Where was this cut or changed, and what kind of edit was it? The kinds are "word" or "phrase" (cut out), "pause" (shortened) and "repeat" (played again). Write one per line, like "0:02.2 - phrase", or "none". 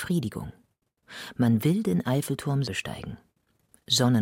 0:02.6 - word